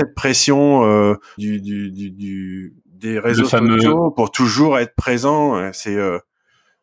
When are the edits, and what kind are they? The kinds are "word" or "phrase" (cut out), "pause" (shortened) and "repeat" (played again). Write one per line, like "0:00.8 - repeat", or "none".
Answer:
0:01.4 - word

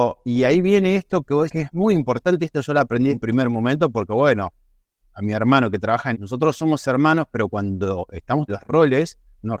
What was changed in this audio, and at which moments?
0:01.5 - word
0:03.1 - word
0:05.0 - word
0:06.1 - word
0:08.5 - word

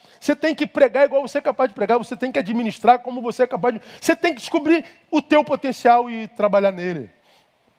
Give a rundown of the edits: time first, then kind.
none

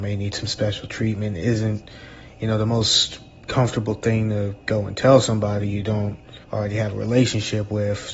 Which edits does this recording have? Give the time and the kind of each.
0:06.4 - pause

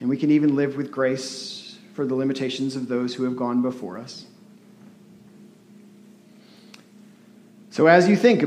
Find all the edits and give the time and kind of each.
none

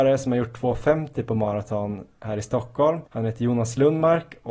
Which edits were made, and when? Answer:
0:03.1 - pause

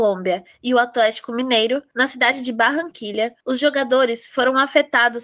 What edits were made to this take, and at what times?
none

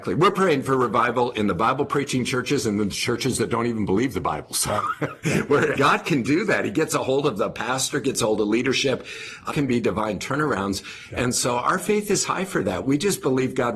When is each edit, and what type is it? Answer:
0:05.8 - phrase
0:09.5 - phrase

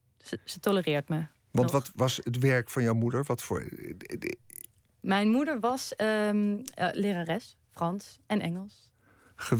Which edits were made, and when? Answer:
none

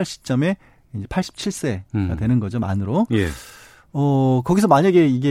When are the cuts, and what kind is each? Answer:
none

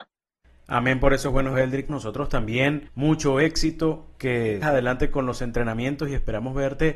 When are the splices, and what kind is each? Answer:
0:01.5 - word
0:01.9 - word
0:02.9 - pause
0:04.6 - word

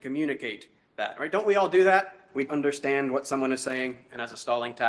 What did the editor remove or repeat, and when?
0:02.5 - word

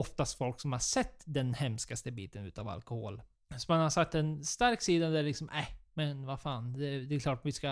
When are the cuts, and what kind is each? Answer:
none

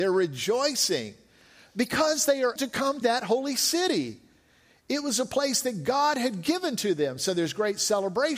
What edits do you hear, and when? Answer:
0:02.6 - word
0:03.0 - word

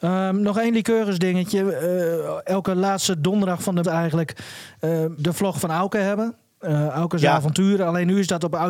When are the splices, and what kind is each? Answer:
0:03.8 - word
0:05.2 - phrase

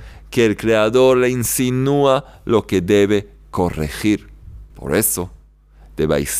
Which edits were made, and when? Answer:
0:04.7 - pause

